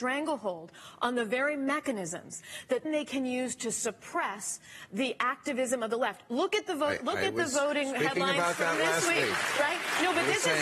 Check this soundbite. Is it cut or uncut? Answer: cut